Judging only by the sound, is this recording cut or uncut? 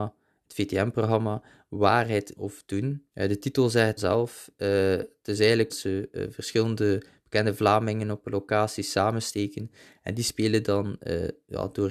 cut